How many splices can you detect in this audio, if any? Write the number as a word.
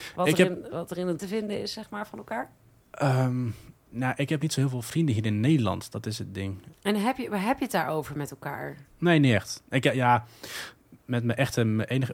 one